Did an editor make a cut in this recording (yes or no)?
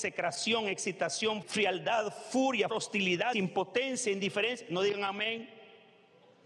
yes